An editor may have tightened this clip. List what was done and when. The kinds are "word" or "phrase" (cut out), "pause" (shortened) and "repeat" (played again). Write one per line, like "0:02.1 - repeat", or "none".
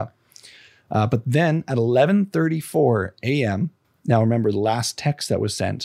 0:03.8 - pause

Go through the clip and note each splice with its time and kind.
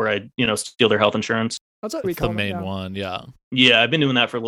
0:02.0 - phrase

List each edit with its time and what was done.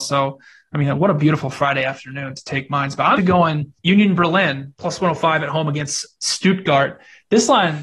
0:03.2 - word

